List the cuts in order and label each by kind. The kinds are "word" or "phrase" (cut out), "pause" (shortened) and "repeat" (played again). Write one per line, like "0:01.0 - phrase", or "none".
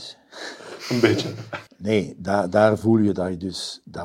0:01.7 - pause